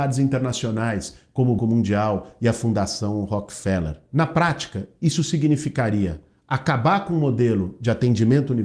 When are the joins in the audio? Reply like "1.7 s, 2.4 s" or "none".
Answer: 1.6 s